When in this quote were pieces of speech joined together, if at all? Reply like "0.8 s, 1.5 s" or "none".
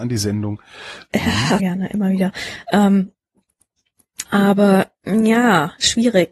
1.6 s, 4.3 s